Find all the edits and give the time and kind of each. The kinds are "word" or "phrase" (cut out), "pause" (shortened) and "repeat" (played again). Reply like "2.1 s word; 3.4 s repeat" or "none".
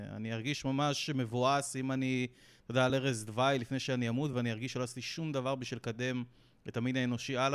none